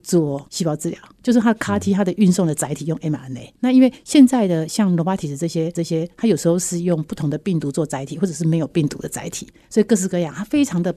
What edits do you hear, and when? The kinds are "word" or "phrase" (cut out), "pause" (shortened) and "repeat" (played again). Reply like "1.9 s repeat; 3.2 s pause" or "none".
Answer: 5.7 s repeat